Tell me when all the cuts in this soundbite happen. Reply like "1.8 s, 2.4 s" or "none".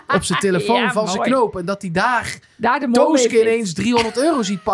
none